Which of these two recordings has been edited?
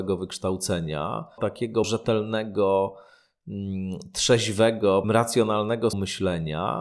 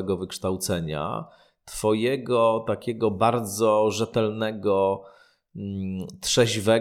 first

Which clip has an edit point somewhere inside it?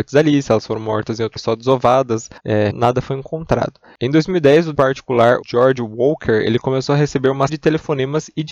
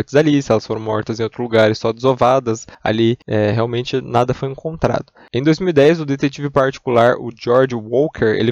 first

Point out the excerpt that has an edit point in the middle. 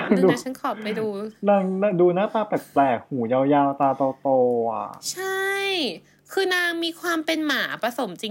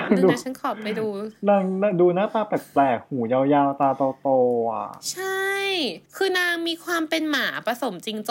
second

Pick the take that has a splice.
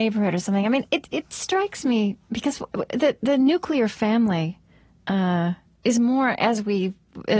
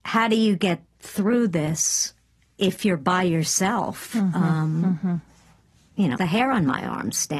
second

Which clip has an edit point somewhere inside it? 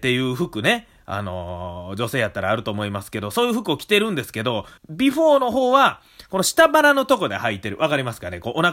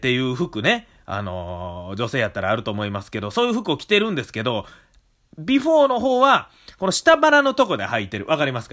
first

